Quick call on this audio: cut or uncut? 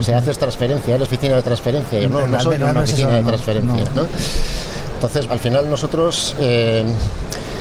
cut